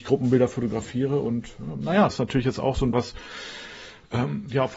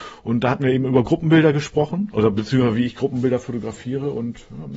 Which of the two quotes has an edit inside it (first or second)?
first